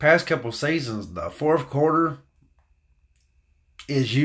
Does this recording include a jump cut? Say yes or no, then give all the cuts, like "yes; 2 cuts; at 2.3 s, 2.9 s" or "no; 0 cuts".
no; 0 cuts